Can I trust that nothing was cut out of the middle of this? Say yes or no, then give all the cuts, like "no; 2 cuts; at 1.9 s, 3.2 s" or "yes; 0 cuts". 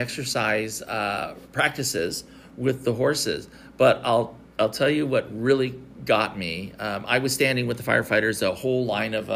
yes; 0 cuts